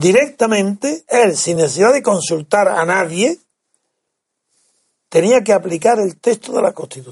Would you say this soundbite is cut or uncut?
uncut